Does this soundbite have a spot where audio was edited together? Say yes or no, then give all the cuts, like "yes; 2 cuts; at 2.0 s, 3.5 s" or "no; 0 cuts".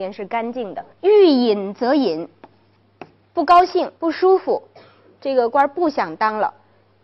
yes; 2 cuts; at 0.9 s, 4.0 s